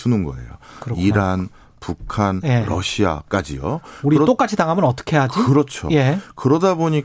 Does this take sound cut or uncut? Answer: uncut